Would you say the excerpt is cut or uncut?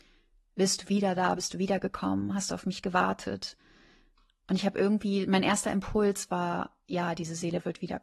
uncut